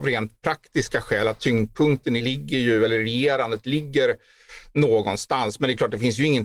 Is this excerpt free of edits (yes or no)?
no